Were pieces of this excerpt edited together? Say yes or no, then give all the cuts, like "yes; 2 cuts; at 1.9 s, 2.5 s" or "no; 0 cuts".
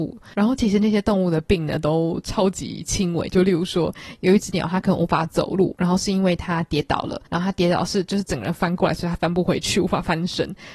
yes; 1 cut; at 7.3 s